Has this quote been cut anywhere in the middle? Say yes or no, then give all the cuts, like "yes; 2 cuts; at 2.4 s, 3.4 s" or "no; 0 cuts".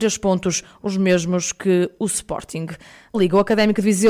yes; 1 cut; at 3.1 s